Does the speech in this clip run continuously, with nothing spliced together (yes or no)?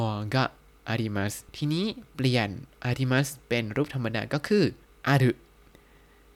no